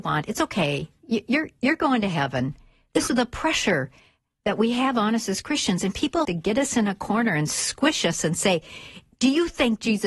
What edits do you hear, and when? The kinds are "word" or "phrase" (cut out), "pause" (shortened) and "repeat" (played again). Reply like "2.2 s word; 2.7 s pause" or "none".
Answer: 3.1 s word; 6.2 s word